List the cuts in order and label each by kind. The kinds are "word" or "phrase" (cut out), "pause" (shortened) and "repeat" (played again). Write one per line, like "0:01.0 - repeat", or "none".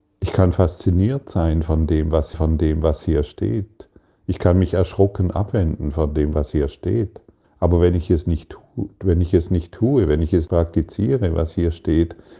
0:02.3 - repeat
0:07.4 - pause
0:10.5 - word